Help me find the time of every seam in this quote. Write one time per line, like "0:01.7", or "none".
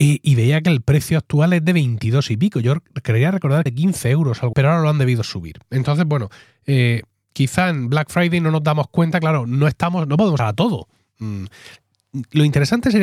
0:03.7
0:04.5
0:10.4

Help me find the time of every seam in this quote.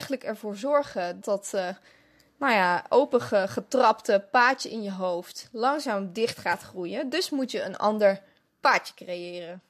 0:01.2

